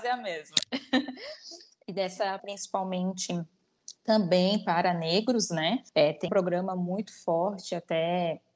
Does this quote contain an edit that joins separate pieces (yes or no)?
yes